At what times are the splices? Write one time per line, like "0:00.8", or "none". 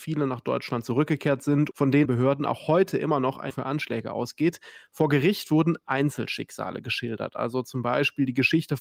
0:01.7
0:02.0
0:03.5